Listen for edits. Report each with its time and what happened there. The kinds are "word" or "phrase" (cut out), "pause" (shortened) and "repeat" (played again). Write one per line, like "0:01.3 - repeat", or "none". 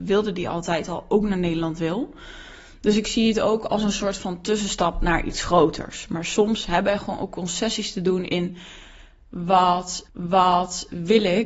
0:10.1 - repeat